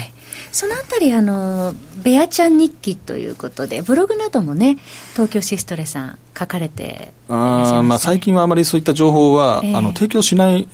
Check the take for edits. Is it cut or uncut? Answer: cut